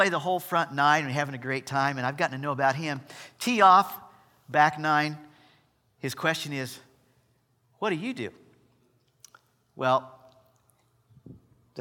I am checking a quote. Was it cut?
no; 0 cuts

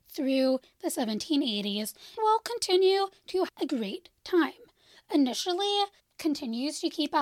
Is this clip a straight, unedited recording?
no; 3 cuts; at 2.2 s, 3.5 s, 6.0 s

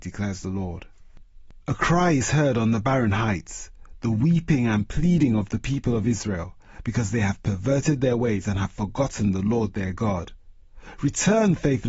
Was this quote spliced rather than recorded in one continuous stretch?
no; 0 cuts

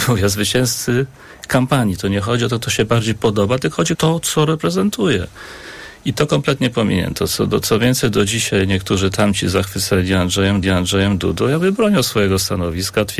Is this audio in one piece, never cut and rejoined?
no; 2 cuts; at 3.9 s, 10.6 s

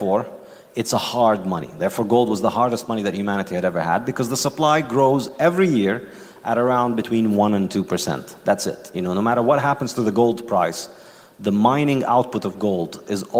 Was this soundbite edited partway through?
no; 0 cuts

